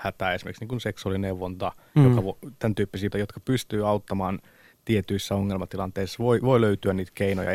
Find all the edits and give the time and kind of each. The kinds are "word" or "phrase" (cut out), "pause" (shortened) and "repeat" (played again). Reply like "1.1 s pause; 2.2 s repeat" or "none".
3.1 s word